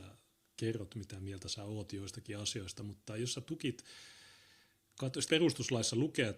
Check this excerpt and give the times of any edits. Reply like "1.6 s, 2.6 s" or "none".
5.3 s